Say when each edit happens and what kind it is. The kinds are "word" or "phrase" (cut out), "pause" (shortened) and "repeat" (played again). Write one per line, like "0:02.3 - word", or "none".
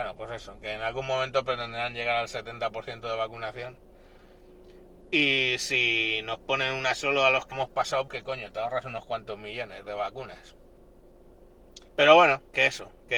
0:07.5 - word
0:08.1 - word
0:11.9 - pause